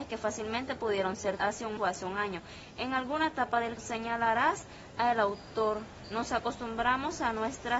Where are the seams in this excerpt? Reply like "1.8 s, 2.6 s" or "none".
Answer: 1.4 s, 1.8 s, 3.8 s